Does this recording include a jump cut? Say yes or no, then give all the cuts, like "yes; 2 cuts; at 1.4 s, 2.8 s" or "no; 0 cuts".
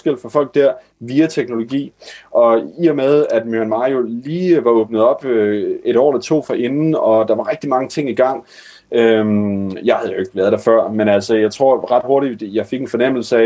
no; 0 cuts